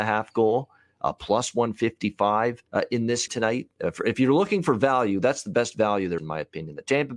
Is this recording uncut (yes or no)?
no